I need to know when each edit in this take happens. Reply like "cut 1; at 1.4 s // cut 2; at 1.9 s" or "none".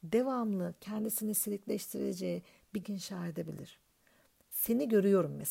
cut 1; at 2.8 s